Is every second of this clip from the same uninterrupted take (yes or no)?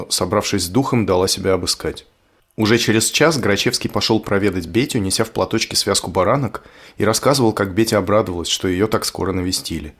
yes